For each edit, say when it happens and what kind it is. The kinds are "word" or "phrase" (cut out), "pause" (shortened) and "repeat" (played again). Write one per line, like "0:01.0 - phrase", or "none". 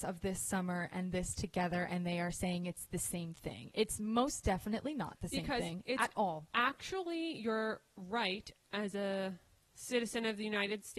none